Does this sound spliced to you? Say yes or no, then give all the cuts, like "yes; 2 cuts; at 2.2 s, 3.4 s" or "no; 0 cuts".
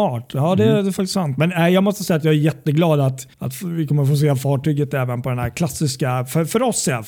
yes; 1 cut; at 3.3 s